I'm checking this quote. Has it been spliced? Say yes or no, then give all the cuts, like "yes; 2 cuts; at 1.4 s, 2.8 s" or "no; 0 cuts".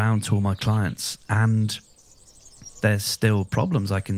yes; 1 cut; at 2.8 s